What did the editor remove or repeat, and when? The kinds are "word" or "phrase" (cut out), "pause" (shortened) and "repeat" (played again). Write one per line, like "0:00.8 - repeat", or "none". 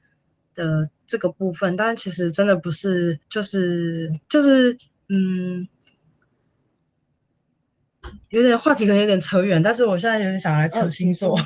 0:03.2 - pause
0:04.2 - pause
0:08.2 - pause